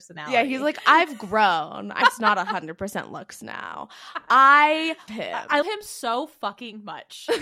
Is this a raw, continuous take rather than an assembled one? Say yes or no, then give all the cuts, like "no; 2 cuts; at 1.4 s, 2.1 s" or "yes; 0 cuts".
no; 3 cuts; at 2.0 s, 5.1 s, 5.6 s